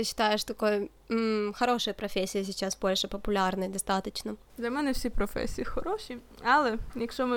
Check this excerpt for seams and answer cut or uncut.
cut